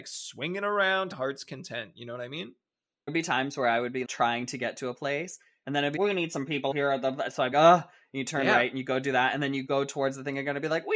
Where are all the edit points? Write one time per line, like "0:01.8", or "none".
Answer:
0:01.1
0:03.1
0:04.0
0:06.0
0:06.7
0:07.5